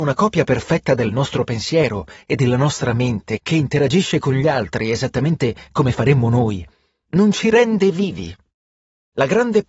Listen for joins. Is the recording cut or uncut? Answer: uncut